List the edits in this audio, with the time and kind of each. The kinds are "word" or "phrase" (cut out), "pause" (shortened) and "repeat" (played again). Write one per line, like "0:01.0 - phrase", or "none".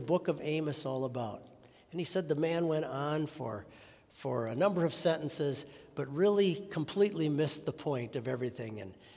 none